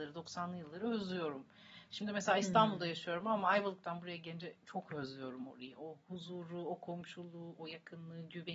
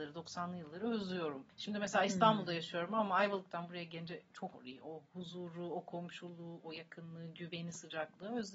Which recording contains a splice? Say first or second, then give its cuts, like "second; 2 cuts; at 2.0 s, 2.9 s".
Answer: second; 2 cuts; at 1.5 s, 4.5 s